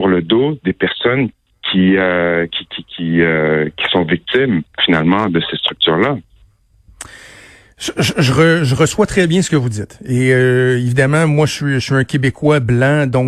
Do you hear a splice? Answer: no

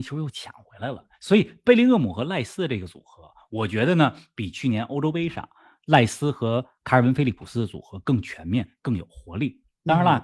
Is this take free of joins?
yes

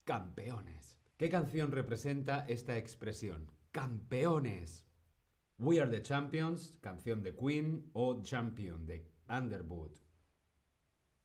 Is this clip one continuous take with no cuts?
no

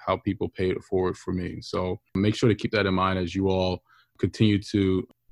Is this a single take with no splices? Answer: yes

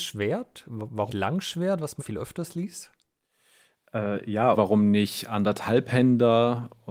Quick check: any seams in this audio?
yes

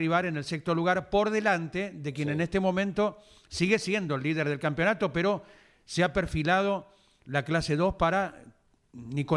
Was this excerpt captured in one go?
yes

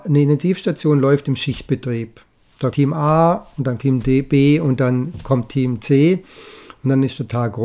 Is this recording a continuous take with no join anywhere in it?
no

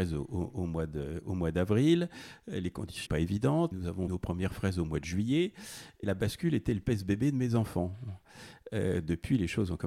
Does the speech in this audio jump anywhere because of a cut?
yes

